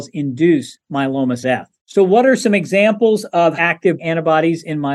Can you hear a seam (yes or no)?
yes